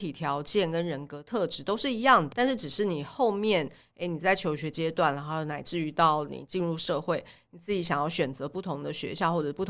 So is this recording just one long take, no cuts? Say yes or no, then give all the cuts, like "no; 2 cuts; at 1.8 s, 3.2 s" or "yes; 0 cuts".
no; 1 cut; at 2.3 s